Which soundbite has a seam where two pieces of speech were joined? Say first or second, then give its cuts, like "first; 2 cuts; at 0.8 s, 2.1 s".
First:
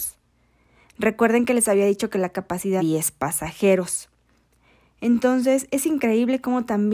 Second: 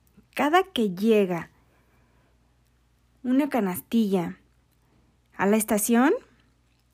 first; 1 cut; at 2.8 s